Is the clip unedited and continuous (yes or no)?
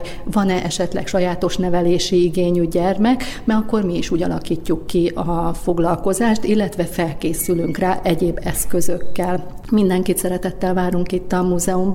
yes